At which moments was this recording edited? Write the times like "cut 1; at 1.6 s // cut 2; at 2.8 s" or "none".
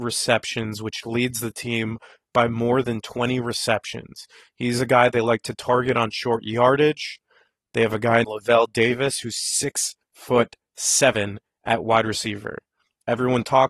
cut 1; at 8.2 s